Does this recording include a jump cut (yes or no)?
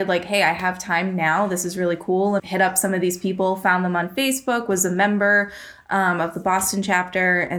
yes